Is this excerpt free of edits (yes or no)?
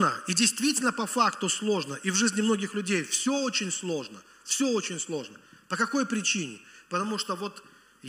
yes